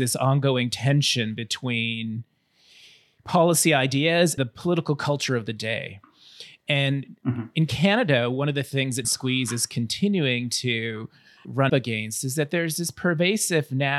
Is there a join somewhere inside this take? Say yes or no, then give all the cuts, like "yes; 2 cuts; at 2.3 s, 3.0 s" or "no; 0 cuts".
yes; 3 cuts; at 4.4 s, 9.0 s, 11.7 s